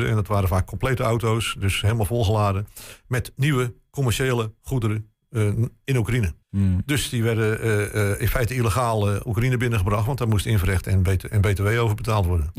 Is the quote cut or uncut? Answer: cut